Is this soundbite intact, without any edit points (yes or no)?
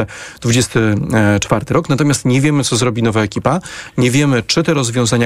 yes